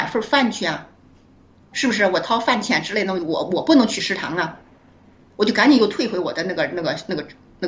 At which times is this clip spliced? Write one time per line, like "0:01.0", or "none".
none

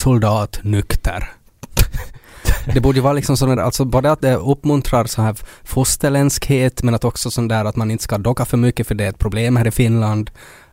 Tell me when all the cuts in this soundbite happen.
0:03.6

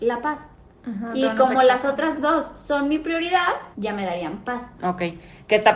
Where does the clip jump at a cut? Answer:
0:03.7

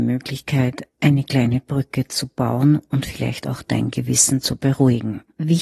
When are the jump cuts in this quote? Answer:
none

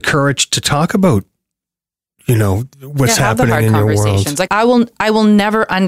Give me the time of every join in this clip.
0:02.7
0:04.5

